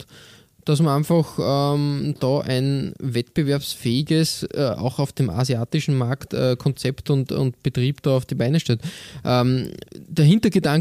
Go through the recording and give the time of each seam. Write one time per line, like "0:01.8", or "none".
0:09.9